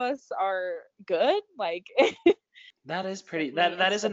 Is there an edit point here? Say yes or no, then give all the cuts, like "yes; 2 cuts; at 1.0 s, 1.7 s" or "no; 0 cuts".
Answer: no; 0 cuts